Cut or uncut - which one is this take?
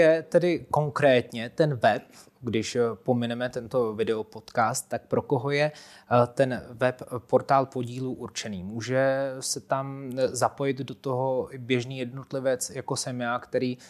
uncut